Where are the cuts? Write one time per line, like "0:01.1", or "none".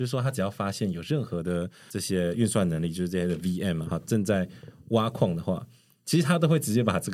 0:03.8